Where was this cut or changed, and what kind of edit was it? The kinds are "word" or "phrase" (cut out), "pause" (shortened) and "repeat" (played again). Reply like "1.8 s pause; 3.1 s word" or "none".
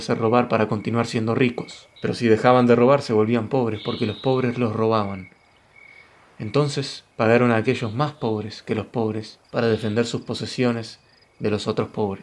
2.0 s pause; 7.1 s pause; 9.4 s pause